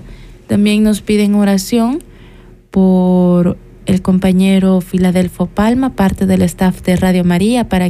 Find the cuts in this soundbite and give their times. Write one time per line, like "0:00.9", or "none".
none